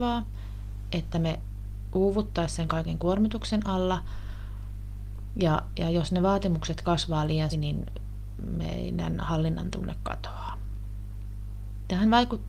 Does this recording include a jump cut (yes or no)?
yes